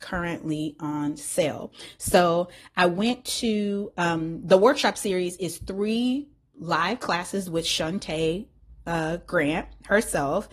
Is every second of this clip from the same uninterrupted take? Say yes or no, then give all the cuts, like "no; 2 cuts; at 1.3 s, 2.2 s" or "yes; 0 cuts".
yes; 0 cuts